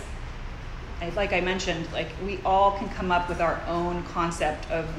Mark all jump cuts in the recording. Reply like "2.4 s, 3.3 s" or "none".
none

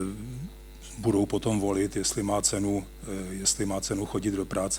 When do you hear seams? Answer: none

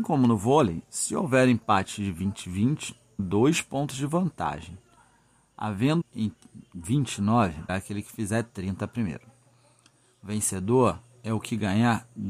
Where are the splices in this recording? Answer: 3.2 s, 6.0 s, 7.7 s

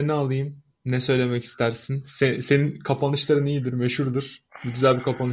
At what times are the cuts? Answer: none

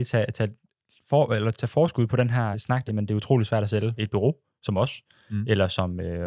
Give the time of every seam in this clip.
1.5 s, 2.5 s, 2.9 s, 4.0 s

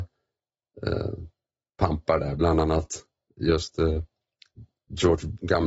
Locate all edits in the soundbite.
none

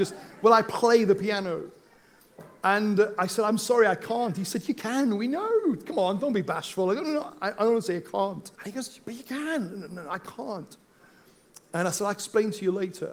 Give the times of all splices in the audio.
8.5 s

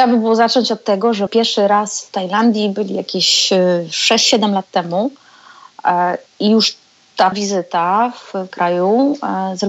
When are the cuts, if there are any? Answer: 1.3 s, 7.3 s, 8.5 s

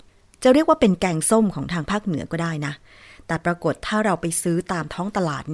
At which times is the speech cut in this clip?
none

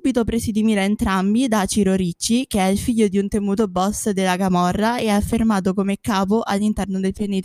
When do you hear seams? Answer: none

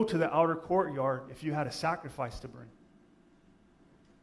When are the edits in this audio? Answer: none

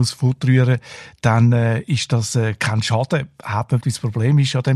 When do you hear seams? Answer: 3.8 s

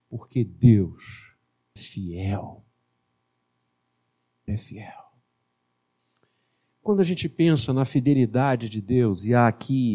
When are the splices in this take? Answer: 1.8 s, 4.5 s, 6.0 s

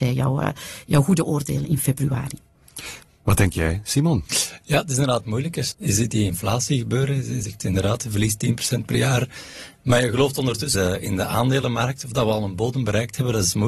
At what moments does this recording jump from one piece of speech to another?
1.6 s, 5.7 s, 10.7 s

